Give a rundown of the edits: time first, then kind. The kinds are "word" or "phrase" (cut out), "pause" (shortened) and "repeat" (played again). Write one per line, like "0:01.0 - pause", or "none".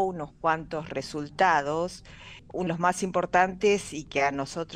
0:02.7 - word